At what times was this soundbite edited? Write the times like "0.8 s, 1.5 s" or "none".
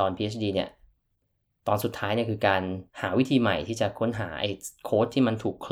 2.9 s